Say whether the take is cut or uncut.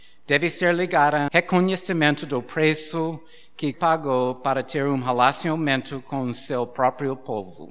cut